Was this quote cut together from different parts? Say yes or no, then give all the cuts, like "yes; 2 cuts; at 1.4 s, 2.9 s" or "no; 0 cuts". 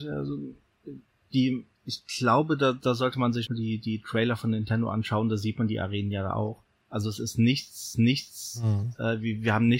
yes; 3 cuts; at 1.7 s, 3.5 s, 7.9 s